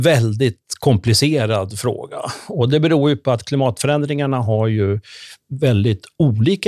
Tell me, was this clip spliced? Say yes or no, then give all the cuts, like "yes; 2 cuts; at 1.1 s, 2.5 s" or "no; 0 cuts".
no; 0 cuts